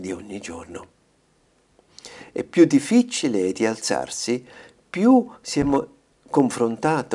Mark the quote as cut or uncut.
uncut